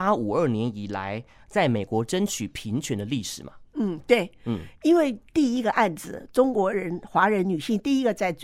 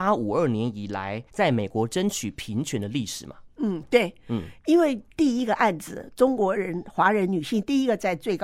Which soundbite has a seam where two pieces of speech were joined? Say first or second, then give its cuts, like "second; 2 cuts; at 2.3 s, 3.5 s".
second; 1 cut; at 1.3 s